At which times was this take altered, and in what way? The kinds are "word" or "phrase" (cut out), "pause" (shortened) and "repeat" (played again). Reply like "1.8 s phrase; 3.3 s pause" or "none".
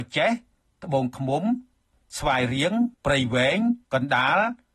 2.9 s pause; 3.8 s pause